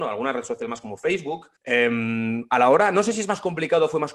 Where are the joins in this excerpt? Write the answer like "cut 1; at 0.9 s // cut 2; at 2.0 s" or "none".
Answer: cut 1; at 1.6 s